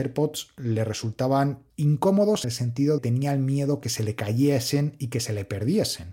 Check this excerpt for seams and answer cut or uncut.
cut